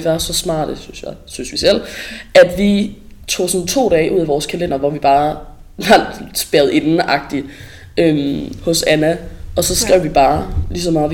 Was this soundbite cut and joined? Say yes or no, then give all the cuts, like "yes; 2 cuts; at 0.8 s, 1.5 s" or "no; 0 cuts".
no; 0 cuts